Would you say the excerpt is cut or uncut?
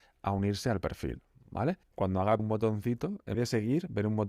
cut